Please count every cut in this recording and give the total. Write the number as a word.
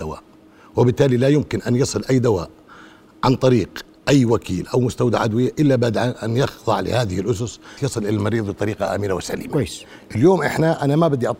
one